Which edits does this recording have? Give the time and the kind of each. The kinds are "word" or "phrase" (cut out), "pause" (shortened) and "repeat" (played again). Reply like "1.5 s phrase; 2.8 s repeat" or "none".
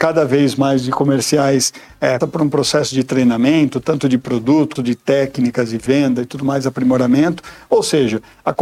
2.2 s word; 4.8 s word